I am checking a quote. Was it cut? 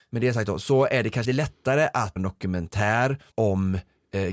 yes; 3 cuts; at 1.2 s, 2.2 s, 3.3 s

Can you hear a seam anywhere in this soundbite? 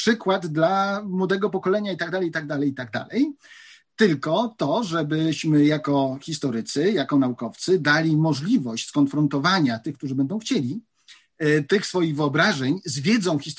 no; 0 cuts

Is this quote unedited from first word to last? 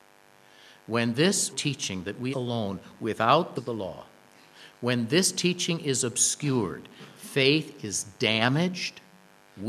no; 3 cuts; at 1.5 s, 2.3 s, 3.6 s

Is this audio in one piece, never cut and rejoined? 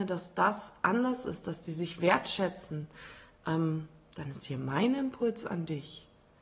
yes; 0 cuts

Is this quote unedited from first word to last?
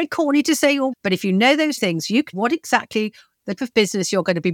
no; 4 cuts; at 0.9 s, 1.8 s, 2.3 s, 3.6 s

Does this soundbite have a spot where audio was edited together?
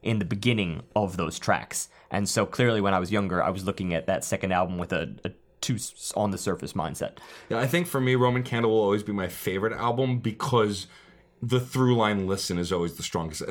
no; 0 cuts

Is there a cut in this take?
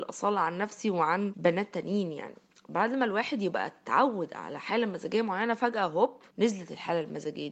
no; 0 cuts

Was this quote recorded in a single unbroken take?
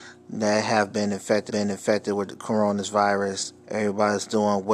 no; 2 cuts; at 1.5 s, 3.6 s

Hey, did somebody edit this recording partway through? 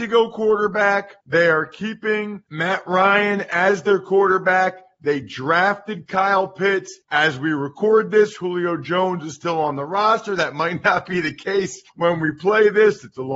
yes; 4 cuts; at 1.2 s, 2.5 s, 7.0 s, 11.9 s

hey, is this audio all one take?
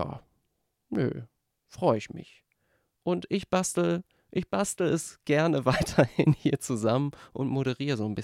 yes; 0 cuts

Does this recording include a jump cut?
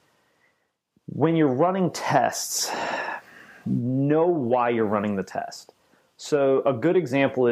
no; 0 cuts

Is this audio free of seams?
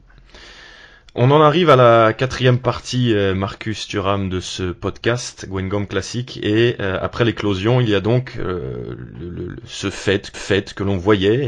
no; 1 cut; at 10.3 s

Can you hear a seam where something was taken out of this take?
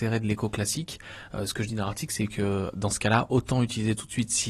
no; 0 cuts

